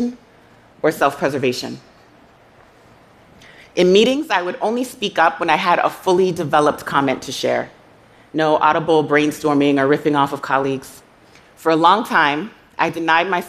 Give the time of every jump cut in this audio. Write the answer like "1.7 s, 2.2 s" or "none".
11.2 s